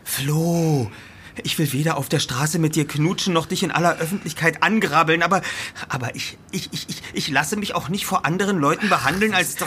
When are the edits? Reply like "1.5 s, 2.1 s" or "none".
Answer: none